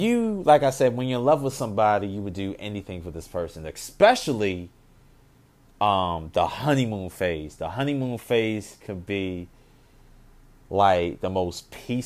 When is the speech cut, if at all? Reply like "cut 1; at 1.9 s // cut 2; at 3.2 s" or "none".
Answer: none